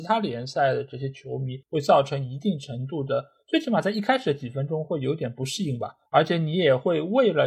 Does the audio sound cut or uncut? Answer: cut